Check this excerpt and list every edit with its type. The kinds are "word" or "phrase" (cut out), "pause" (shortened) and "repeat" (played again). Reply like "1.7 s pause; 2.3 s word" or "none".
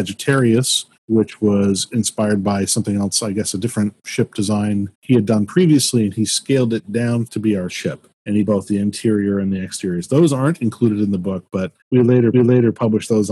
1.0 s pause; 4.9 s pause; 7.3 s phrase; 7.7 s word; 8.1 s pause; 8.5 s word; 11.8 s pause; 12.3 s repeat